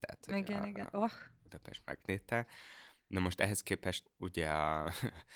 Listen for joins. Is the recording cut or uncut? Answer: cut